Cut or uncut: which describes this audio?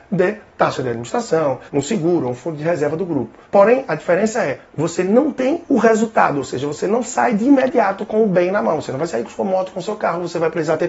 cut